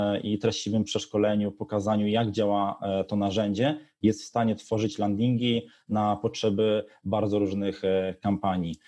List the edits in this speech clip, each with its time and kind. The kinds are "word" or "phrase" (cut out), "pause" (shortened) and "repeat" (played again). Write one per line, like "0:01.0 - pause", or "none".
none

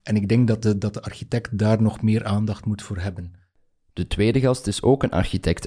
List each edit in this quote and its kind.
none

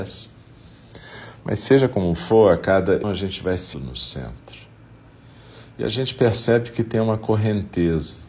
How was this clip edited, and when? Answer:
0:03.0 - word
0:03.7 - word

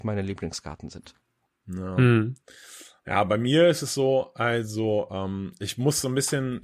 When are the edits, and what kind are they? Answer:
none

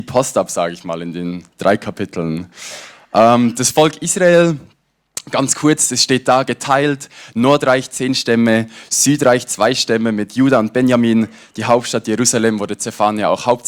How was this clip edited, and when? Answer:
none

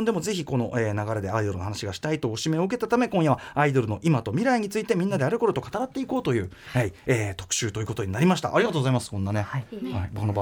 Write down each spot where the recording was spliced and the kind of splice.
none

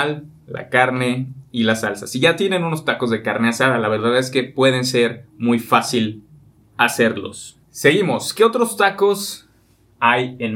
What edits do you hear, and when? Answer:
0:07.6 - pause

